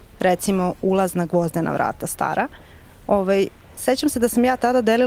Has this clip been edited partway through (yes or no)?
no